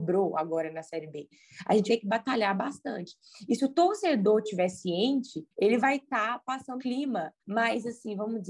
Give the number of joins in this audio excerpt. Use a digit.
4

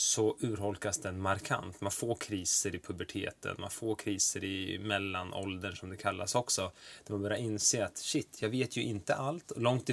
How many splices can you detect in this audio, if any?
0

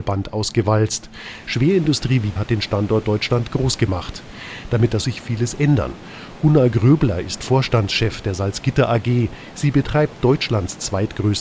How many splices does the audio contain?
2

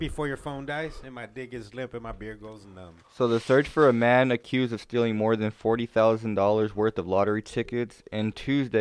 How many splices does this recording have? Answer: 1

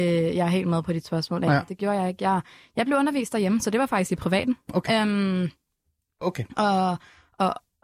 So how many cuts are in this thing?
0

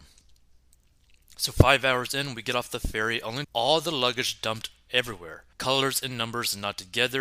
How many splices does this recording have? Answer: 2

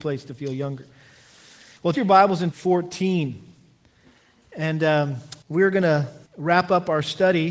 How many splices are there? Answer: 4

